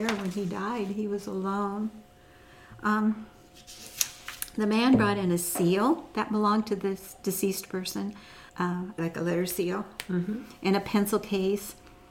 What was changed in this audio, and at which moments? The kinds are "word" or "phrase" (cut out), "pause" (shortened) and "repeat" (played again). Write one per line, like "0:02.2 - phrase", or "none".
0:08.5 - pause
0:09.0 - phrase